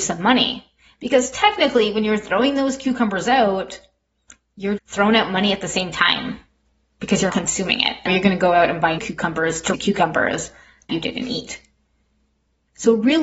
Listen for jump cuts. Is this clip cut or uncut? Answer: cut